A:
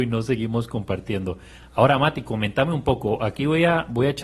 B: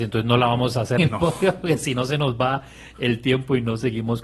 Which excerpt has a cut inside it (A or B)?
B